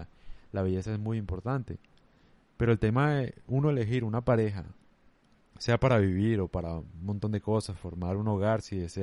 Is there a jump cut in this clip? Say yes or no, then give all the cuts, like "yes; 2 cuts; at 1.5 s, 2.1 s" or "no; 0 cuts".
no; 0 cuts